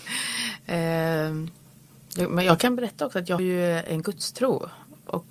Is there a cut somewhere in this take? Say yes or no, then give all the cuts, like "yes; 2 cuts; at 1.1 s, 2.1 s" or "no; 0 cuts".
yes; 1 cut; at 3.4 s